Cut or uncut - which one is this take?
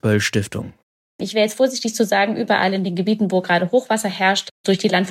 uncut